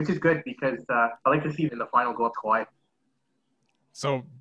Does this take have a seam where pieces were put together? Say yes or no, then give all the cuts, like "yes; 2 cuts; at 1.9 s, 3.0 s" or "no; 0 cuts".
yes; 3 cuts; at 1.2 s, 1.7 s, 2.3 s